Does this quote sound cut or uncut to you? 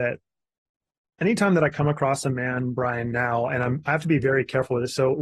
uncut